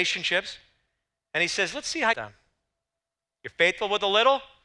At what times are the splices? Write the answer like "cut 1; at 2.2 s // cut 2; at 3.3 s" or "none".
cut 1; at 2.1 s